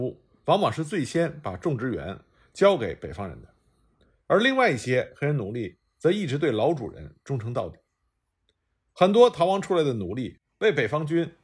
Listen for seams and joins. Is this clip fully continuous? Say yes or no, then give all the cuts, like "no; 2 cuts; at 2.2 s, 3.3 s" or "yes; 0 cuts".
yes; 0 cuts